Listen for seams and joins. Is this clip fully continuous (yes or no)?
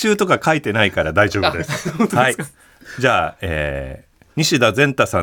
yes